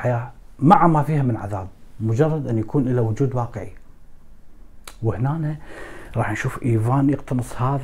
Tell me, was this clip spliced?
no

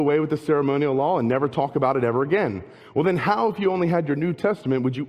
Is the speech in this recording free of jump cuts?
yes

